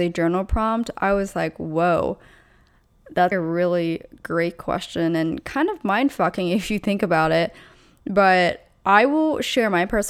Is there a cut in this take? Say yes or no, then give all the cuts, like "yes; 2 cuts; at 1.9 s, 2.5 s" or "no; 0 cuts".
yes; 1 cut; at 3.3 s